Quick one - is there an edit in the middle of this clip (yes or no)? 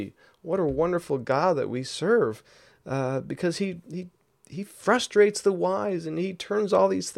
no